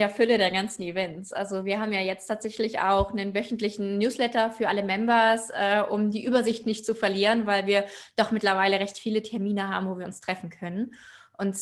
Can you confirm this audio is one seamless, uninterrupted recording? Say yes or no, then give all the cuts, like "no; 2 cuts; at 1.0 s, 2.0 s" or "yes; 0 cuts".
yes; 0 cuts